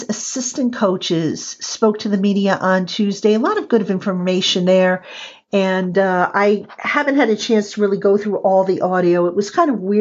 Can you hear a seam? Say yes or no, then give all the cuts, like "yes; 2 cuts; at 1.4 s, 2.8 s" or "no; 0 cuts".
no; 0 cuts